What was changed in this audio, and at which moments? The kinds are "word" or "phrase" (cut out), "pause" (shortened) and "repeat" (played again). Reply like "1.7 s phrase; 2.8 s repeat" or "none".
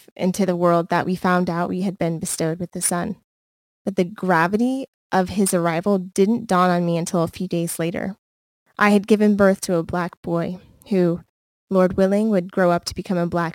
none